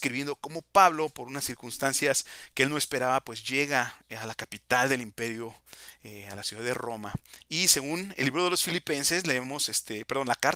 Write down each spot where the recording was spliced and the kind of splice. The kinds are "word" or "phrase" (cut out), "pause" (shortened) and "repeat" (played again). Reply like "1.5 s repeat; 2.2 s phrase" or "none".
none